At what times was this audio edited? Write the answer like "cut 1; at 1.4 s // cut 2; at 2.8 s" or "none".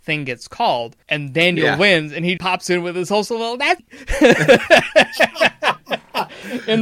cut 1; at 1.0 s // cut 2; at 2.4 s // cut 3; at 3.8 s